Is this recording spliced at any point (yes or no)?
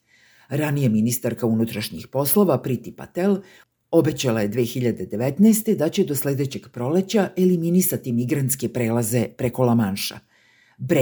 no